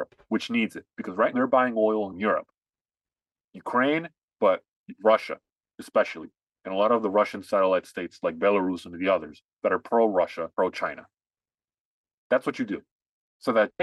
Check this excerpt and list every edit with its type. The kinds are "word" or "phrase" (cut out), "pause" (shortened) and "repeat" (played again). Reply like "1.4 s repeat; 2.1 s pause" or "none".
1.3 s word; 2.1 s phrase; 10.5 s pause